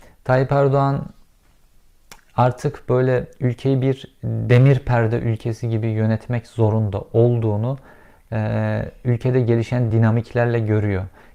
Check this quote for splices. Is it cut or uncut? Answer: uncut